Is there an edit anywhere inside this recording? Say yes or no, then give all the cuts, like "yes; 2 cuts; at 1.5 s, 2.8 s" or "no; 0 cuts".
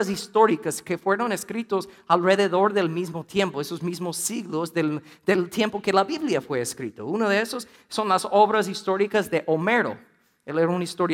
no; 0 cuts